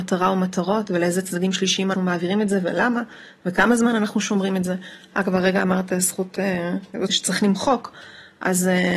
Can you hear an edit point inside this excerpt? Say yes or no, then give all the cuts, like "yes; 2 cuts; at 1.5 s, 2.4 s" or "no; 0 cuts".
yes; 2 cuts; at 1.9 s, 7.1 s